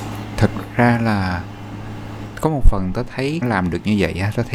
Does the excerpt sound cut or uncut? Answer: cut